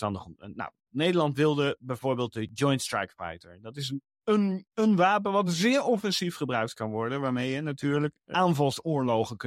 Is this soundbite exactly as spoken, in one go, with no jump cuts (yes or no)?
yes